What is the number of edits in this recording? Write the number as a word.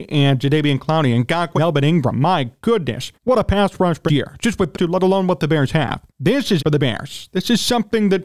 six